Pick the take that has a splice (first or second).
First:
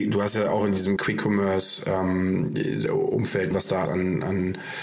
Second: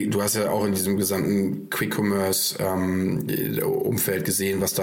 first